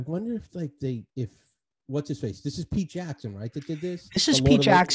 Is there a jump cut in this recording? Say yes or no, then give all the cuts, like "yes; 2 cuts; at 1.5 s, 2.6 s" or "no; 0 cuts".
yes; 1 cut; at 1.1 s